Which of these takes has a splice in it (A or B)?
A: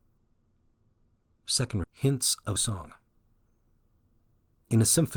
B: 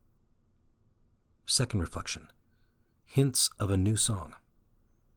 A